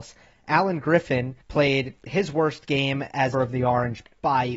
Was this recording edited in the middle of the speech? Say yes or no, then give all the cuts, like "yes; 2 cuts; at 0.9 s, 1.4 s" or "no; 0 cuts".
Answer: yes; 2 cuts; at 1.4 s, 3.3 s